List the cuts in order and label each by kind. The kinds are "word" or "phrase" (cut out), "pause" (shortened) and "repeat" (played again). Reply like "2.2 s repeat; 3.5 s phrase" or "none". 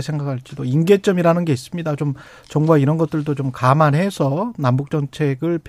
none